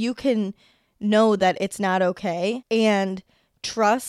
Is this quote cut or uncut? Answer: uncut